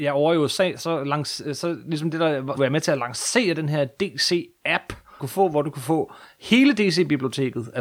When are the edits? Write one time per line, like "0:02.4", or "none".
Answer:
0:02.6
0:05.2